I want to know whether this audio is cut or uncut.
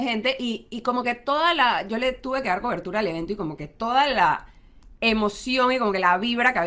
uncut